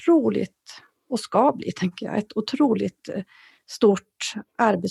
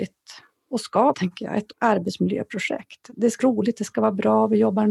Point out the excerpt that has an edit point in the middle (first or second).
second